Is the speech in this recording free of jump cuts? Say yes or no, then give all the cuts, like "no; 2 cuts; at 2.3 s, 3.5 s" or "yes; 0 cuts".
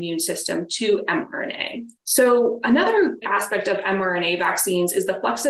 no; 2 cuts; at 2.0 s, 3.2 s